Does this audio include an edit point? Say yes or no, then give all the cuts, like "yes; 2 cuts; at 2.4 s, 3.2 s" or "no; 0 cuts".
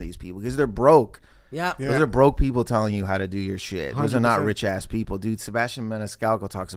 no; 0 cuts